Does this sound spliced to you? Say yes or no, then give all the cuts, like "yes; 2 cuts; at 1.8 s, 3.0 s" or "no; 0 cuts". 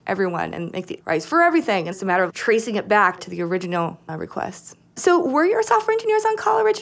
yes; 4 cuts; at 1.0 s, 1.9 s, 2.3 s, 3.2 s